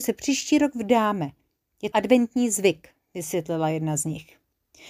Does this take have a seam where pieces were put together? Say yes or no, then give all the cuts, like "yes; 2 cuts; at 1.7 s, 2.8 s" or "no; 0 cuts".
yes; 1 cut; at 1.9 s